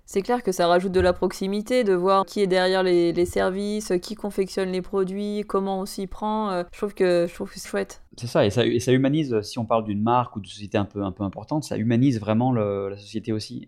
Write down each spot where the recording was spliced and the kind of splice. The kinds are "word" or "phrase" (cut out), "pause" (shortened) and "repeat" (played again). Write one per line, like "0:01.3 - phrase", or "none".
0:02.2 - word
0:06.7 - pause
0:07.6 - word
0:08.1 - pause